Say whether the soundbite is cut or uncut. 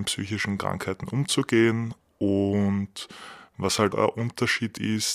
cut